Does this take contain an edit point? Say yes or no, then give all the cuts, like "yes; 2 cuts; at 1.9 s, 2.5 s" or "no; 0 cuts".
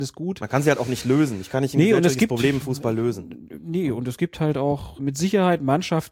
yes; 1 cut; at 5.0 s